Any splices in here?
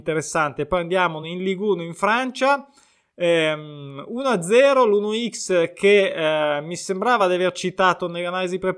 no; 0 cuts

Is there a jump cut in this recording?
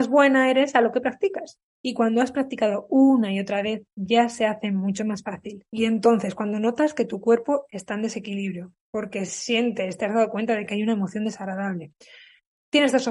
no; 0 cuts

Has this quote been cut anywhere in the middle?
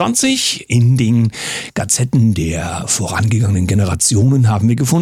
no; 0 cuts

